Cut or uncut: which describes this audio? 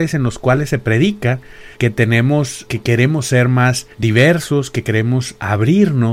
cut